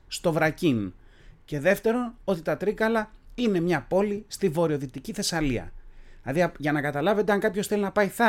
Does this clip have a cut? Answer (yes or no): no